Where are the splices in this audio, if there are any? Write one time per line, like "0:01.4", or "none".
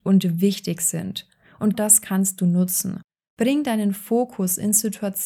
0:01.7